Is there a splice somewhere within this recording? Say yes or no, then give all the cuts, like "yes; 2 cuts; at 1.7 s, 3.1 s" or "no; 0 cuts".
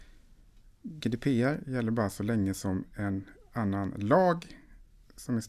no; 0 cuts